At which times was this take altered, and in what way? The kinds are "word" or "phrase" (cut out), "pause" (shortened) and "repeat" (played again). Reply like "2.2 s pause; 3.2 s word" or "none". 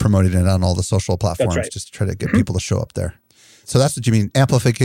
none